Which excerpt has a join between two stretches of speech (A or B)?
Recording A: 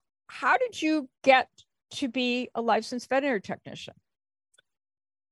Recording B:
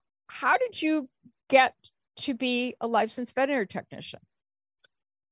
A